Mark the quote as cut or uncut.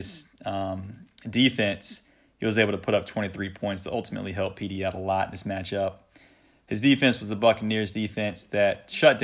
uncut